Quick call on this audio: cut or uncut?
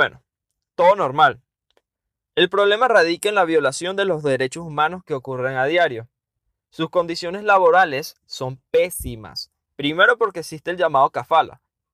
uncut